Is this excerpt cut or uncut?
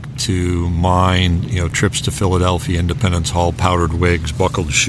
uncut